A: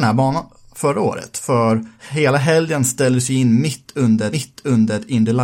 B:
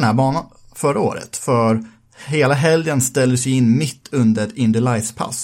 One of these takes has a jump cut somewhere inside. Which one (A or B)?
A